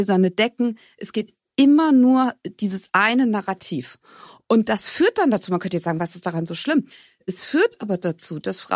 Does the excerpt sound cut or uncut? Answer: uncut